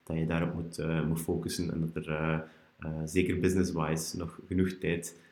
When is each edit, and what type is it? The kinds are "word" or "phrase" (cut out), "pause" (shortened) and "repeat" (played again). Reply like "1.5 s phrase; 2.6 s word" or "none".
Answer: none